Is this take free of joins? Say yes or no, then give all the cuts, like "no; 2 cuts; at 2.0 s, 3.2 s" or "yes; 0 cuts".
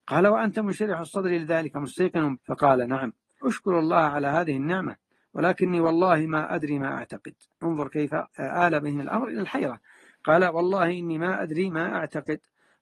no; 3 cuts; at 2.4 s, 3.4 s, 8.3 s